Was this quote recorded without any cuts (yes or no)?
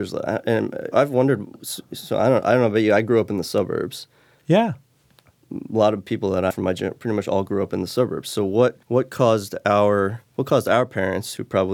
no